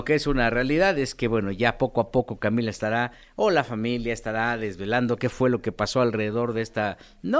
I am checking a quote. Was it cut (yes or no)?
no